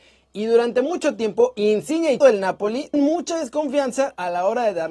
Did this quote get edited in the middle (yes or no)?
yes